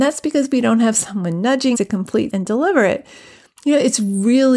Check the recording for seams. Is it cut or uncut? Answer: cut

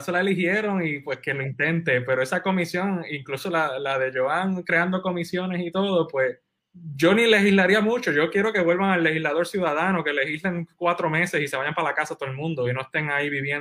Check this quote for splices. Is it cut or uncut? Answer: cut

